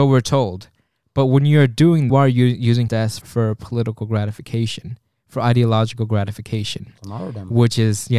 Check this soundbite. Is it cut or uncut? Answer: cut